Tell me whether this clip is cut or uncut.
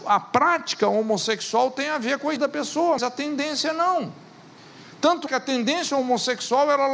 cut